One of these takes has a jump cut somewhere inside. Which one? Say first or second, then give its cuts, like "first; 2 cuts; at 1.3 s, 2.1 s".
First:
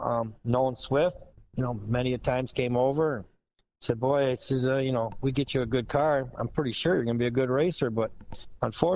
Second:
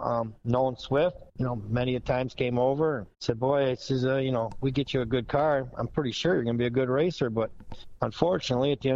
second; 2 cuts; at 1.3 s, 3.1 s